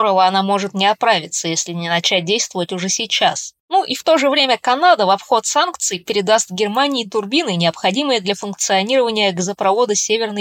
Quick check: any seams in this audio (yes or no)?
no